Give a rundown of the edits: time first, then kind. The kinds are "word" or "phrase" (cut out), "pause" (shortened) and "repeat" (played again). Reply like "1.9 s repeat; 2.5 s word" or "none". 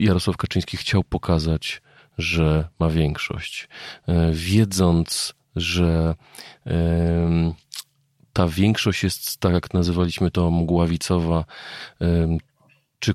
none